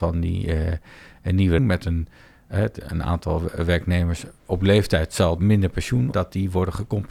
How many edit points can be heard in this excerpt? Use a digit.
3